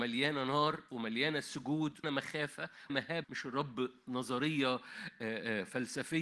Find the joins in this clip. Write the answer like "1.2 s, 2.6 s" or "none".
2.0 s, 2.9 s, 3.2 s